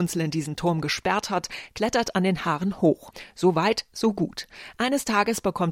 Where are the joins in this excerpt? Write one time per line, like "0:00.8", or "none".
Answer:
none